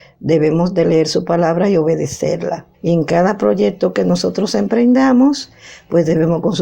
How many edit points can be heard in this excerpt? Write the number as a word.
one